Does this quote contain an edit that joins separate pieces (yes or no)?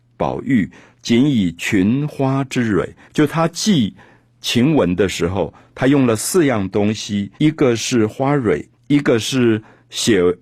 yes